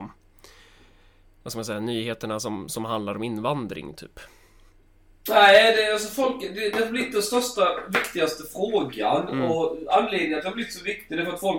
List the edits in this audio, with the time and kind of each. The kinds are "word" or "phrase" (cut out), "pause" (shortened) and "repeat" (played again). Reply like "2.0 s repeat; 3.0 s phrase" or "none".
none

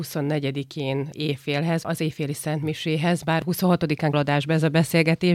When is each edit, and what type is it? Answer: 4.1 s word

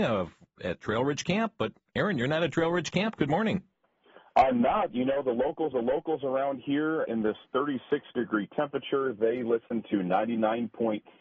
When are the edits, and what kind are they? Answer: 5.7 s repeat; 7.1 s word

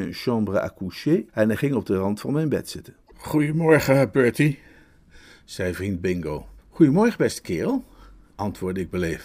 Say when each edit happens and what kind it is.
1.3 s pause; 3.0 s pause; 6.6 s pause

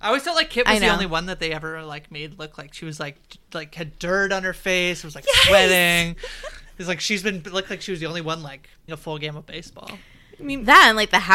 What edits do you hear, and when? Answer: 8.9 s word

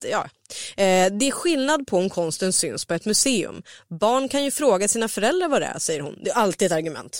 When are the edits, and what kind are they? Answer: none

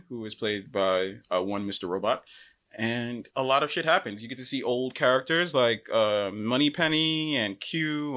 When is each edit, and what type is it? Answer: 3.3 s pause

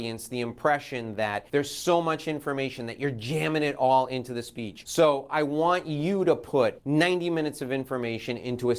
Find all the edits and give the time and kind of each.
none

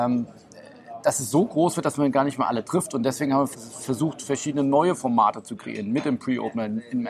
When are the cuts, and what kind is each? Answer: 3.5 s word

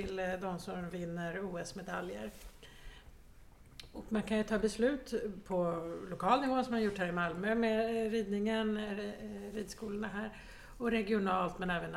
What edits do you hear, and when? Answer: none

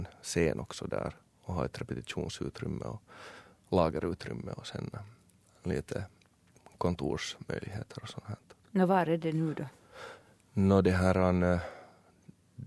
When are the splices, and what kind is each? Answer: none

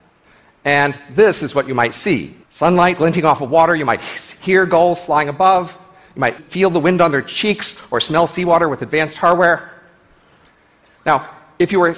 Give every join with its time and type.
2.4 s pause; 6.4 s word

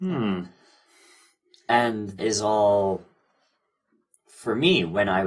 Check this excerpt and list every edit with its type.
2.2 s word

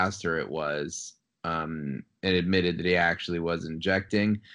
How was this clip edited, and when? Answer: none

